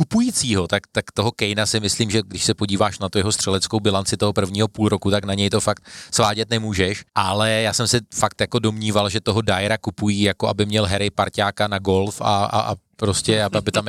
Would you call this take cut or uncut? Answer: uncut